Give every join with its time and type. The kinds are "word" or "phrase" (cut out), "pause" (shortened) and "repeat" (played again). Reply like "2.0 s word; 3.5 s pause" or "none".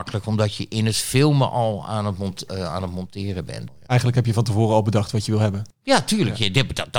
5.7 s pause